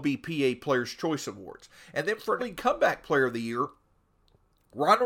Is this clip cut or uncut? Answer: cut